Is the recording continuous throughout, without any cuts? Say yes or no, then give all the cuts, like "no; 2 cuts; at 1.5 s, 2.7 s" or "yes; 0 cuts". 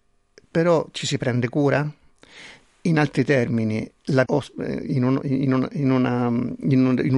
no; 1 cut; at 4.3 s